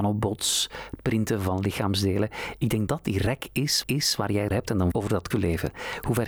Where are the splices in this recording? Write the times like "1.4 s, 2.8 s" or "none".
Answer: 2.9 s, 3.8 s, 4.5 s, 4.9 s, 5.3 s